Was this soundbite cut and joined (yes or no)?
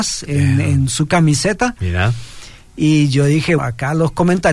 yes